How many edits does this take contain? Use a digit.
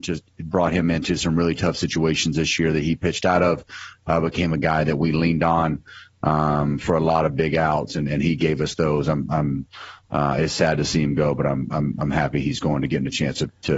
0